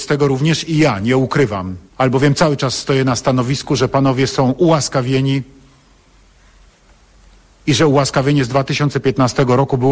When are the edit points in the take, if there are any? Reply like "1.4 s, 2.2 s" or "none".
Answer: 1.9 s